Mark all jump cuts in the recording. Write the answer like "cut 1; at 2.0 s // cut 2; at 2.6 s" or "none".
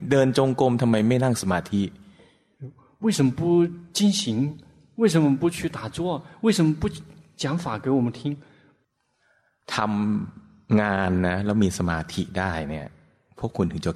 none

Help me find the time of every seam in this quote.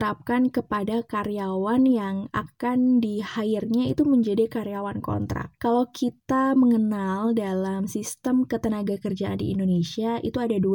none

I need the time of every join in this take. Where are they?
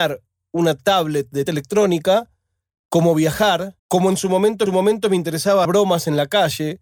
cut 1; at 1.5 s // cut 2; at 3.8 s // cut 3; at 4.7 s // cut 4; at 5.6 s

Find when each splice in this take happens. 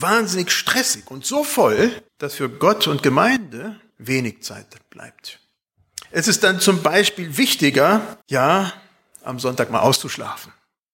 cut 1; at 2.1 s // cut 2; at 3.9 s // cut 3; at 6.0 s // cut 4; at 8.2 s

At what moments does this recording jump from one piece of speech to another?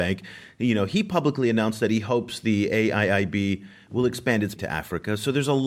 cut 1; at 4.6 s

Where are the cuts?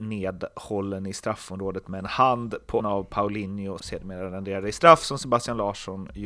cut 1; at 2.8 s // cut 2; at 3.8 s

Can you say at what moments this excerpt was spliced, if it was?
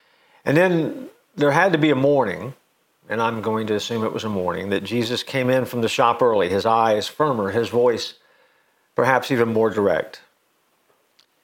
none

